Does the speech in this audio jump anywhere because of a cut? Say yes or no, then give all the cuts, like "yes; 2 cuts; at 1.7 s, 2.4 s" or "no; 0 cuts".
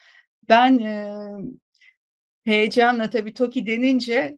no; 0 cuts